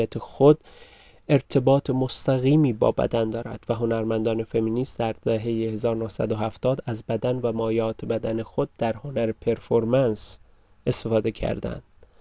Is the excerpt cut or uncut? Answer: uncut